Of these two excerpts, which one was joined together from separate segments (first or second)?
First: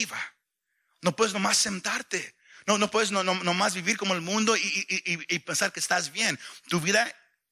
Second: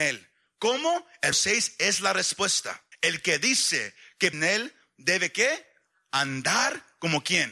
second